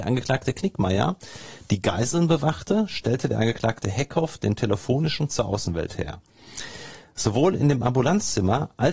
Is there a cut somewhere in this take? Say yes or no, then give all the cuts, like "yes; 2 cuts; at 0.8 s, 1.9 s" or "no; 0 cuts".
yes; 1 cut; at 5.3 s